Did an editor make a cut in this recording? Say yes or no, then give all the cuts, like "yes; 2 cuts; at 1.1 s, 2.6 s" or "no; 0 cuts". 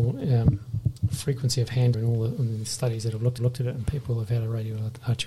yes; 2 cuts; at 1.9 s, 3.4 s